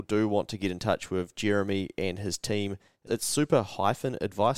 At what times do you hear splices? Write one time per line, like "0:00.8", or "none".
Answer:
0:03.1